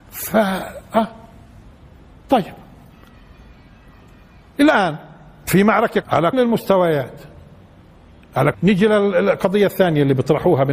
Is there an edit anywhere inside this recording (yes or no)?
yes